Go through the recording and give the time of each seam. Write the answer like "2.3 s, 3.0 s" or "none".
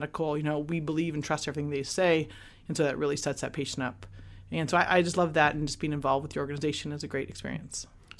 none